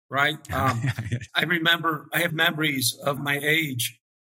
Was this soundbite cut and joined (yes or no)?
yes